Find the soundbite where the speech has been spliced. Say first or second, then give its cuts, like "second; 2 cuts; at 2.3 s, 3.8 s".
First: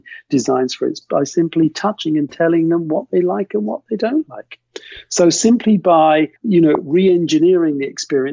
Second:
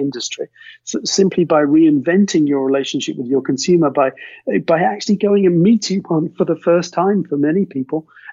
first; 2 cuts; at 1.0 s, 6.4 s